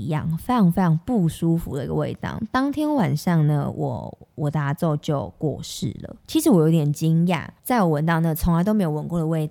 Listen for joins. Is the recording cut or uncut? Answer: cut